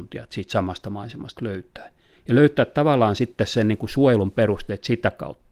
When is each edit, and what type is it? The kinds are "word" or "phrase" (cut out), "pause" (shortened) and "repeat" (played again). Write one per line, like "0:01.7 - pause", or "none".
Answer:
none

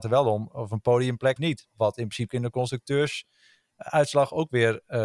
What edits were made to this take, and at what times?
0:01.4 - word
0:02.3 - word

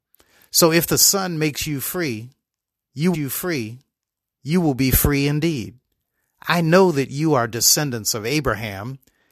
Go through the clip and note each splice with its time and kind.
0:03.1 - repeat

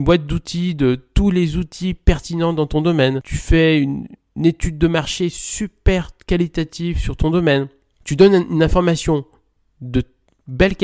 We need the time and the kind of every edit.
none

